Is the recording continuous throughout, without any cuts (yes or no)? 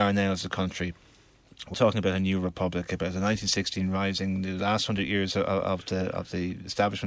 no